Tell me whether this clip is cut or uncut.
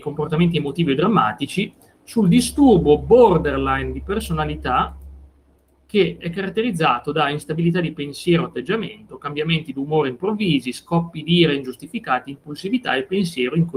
uncut